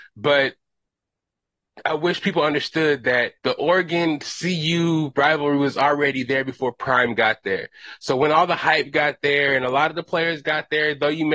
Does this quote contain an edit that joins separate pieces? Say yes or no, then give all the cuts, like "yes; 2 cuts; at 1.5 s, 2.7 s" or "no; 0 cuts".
yes; 1 cut; at 3.4 s